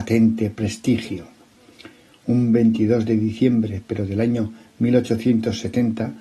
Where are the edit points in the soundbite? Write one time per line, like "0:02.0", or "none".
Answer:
none